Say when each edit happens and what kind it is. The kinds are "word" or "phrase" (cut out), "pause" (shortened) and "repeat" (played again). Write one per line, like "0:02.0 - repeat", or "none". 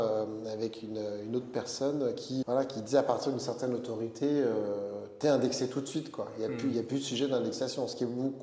0:02.4 - word